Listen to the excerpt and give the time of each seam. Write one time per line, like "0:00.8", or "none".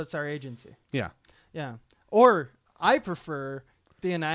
none